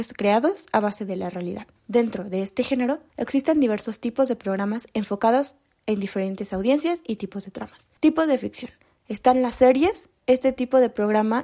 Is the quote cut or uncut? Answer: cut